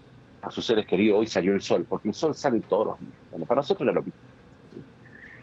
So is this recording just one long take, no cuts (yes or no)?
yes